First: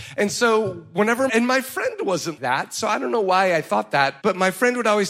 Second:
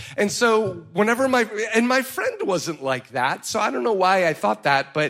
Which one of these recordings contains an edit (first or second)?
first